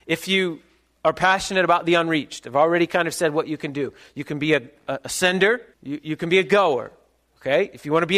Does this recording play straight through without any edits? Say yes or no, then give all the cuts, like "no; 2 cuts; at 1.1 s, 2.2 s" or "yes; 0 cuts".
no; 1 cut; at 5.7 s